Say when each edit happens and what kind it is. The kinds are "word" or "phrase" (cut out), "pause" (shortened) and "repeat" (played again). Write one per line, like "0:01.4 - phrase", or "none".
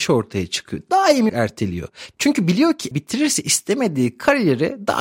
0:01.3 - word
0:02.9 - word